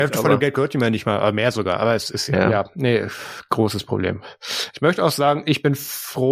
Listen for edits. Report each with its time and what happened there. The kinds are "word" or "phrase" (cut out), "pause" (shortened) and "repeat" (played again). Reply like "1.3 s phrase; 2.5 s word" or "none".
none